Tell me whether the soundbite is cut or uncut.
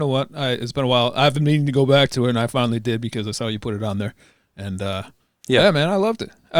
uncut